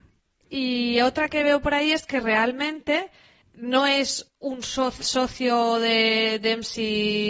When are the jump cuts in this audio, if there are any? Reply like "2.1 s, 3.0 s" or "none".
3.4 s, 4.3 s, 5.0 s